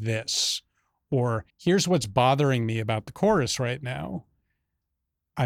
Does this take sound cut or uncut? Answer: cut